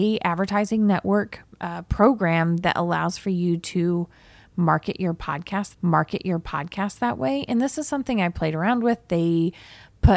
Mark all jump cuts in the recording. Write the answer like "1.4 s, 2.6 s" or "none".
1.5 s, 5.7 s

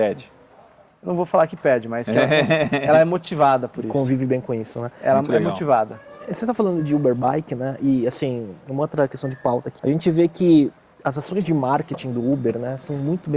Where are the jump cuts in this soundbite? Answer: 9.8 s

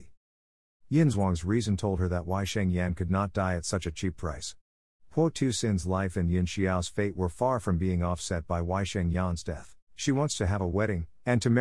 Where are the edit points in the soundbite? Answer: 9.8 s

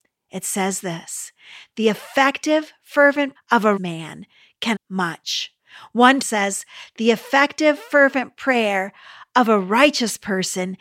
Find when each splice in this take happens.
3.4 s, 3.8 s, 4.8 s, 6.2 s

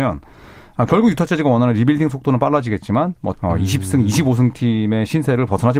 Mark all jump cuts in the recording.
3.3 s

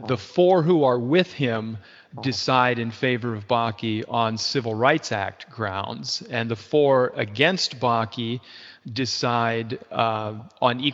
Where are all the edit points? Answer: none

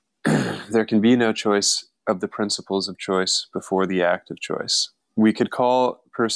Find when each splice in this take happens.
2.0 s

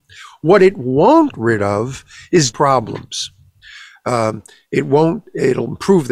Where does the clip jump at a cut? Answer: 1.3 s, 2.5 s

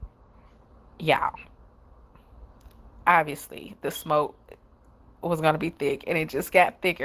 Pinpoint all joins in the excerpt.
none

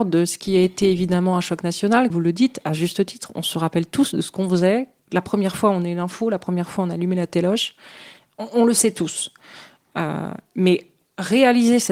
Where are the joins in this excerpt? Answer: 2.1 s

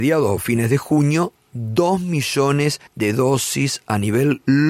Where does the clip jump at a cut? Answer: 2.9 s

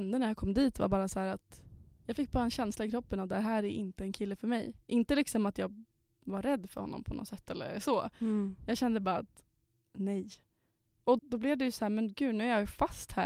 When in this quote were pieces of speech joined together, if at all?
11.2 s

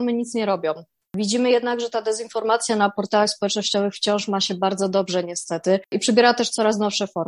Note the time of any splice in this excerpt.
5.9 s

